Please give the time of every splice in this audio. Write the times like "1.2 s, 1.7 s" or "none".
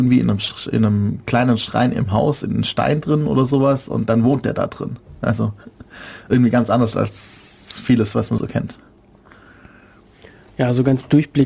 8.4 s